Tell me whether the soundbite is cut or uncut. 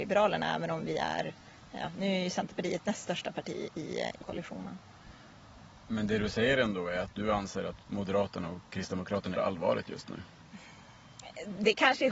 cut